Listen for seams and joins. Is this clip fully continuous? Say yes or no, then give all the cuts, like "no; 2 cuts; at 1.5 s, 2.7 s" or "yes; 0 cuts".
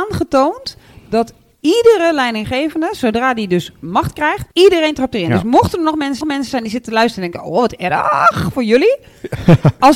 no; 2 cuts; at 4.5 s, 6.2 s